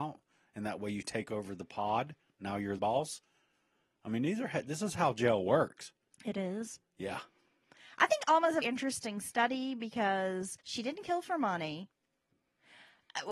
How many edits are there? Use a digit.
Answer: 4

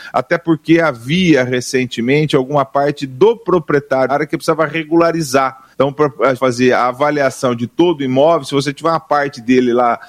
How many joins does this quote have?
3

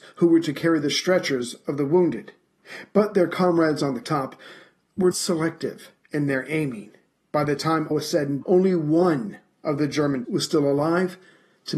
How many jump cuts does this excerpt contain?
5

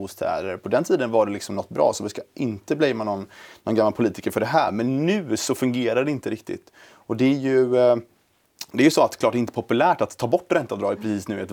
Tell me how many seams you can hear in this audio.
0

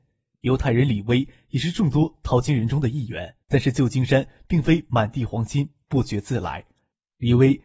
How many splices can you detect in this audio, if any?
1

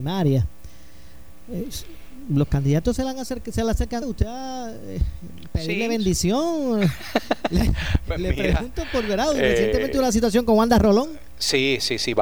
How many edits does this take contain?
1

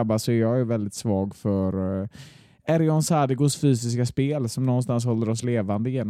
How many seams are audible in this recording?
0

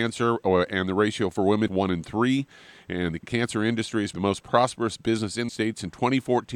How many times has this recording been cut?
4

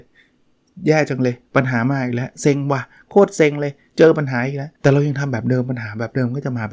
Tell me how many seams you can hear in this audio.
2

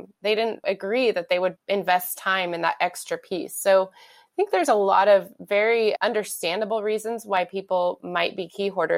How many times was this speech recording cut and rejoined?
0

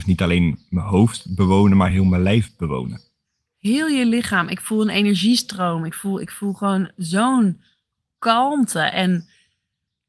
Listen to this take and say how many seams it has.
0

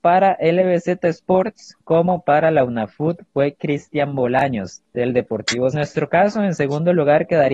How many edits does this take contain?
2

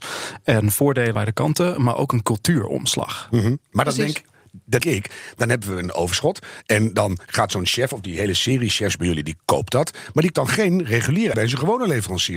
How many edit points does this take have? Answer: 4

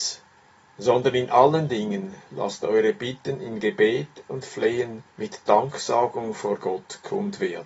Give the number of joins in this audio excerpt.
1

